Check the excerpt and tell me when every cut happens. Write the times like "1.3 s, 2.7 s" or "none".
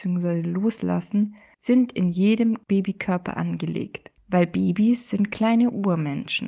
none